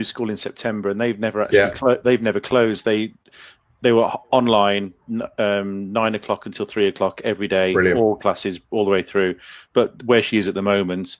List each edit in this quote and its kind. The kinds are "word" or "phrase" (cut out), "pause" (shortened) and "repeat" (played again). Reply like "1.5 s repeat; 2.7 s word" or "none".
none